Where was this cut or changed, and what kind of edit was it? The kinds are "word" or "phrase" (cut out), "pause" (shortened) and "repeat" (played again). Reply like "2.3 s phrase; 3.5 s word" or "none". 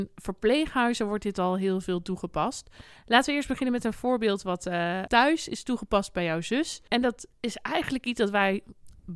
7.3 s pause